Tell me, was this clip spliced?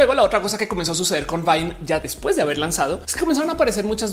no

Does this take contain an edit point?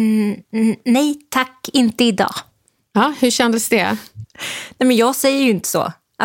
no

